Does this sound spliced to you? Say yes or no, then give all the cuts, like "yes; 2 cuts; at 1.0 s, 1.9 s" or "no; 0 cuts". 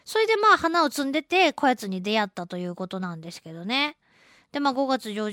no; 0 cuts